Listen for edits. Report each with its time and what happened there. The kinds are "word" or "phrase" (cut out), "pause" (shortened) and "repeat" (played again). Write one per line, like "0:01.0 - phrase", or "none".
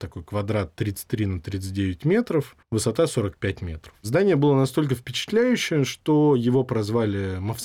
0:02.6 - pause